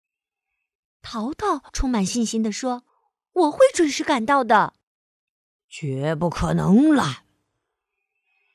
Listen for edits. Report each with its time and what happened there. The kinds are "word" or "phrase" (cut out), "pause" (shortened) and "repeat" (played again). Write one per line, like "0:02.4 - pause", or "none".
0:01.7 - pause
0:02.9 - pause
0:04.8 - pause